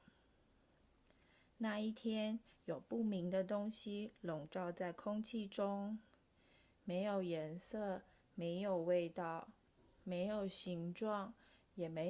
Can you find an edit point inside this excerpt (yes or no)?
no